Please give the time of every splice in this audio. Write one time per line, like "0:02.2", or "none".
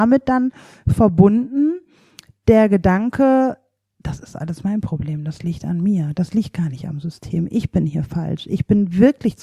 none